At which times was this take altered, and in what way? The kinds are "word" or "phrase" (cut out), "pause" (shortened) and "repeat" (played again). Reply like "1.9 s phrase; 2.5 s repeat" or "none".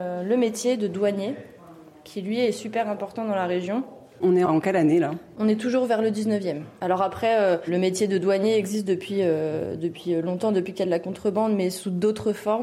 none